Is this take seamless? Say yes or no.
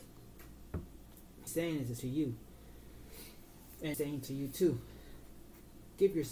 no